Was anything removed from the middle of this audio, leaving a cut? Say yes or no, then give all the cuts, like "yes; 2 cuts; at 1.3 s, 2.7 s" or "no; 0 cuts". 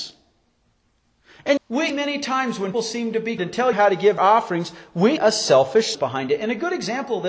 yes; 8 cuts; at 1.6 s, 1.9 s, 2.7 s, 3.4 s, 3.7 s, 4.2 s, 5.2 s, 5.9 s